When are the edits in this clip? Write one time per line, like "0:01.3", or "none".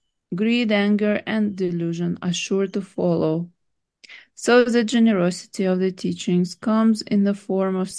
none